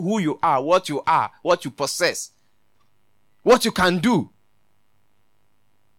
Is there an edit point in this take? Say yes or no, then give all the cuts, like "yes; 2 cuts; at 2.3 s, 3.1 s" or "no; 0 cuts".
no; 0 cuts